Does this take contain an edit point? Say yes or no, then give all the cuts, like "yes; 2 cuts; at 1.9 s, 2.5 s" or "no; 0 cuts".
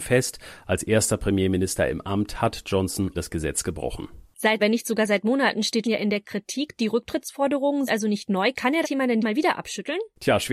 yes; 6 cuts; at 3.1 s, 4.6 s, 5.8 s, 7.9 s, 8.8 s, 9.2 s